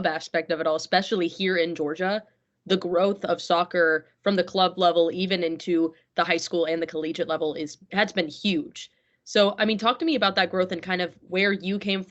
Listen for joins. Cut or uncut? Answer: uncut